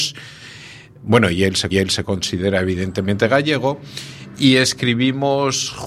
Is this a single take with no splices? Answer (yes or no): no